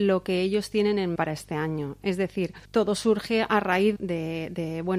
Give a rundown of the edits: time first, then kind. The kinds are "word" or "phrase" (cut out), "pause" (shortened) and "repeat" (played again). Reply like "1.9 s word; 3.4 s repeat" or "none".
1.2 s word; 2.6 s pause; 4.0 s word